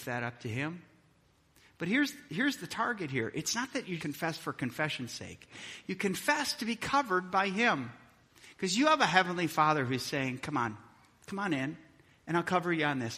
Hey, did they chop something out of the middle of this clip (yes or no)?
yes